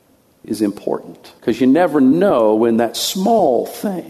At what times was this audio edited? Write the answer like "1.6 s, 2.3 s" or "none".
1.4 s